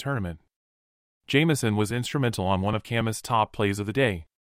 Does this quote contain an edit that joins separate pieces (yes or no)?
no